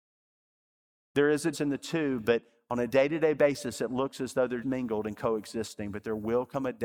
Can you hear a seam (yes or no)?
yes